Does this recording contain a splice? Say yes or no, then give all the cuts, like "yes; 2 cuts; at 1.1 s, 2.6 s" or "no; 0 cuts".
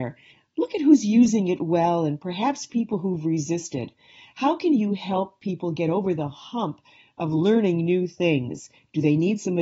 no; 0 cuts